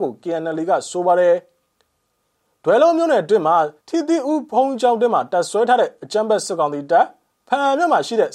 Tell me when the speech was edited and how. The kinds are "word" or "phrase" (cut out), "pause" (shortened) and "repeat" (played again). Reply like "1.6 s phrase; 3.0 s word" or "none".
3.8 s pause